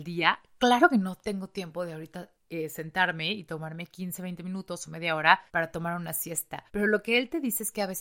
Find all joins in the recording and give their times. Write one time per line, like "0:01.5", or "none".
0:02.4
0:05.5
0:06.7